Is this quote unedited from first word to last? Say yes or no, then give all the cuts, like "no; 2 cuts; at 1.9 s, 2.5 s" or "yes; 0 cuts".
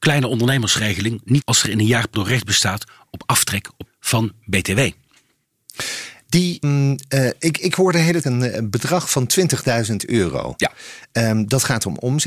no; 5 cuts; at 1.4 s, 2.1 s, 3.9 s, 6.6 s, 8.2 s